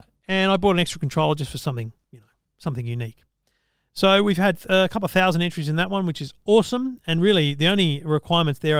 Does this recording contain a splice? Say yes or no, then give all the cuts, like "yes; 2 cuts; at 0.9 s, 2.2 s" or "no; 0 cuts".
no; 0 cuts